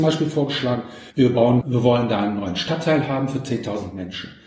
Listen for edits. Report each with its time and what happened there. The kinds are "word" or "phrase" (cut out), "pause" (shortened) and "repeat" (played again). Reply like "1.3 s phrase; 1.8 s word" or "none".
1.1 s pause; 1.6 s word